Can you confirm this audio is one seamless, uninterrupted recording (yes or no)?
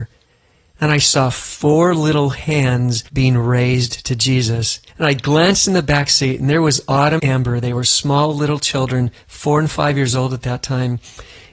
no